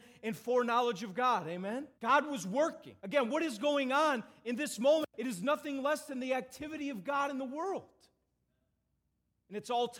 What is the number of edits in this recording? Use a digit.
3